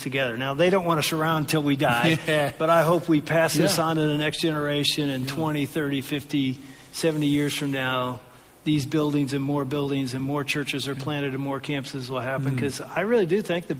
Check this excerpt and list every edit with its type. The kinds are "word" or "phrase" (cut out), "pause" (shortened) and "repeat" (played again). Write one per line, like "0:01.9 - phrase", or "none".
none